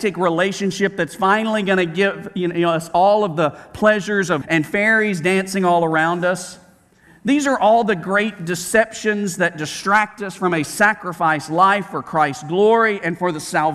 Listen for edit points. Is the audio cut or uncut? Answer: cut